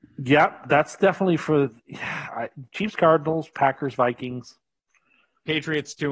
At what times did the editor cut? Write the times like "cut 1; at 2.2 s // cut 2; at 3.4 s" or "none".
cut 1; at 1.8 s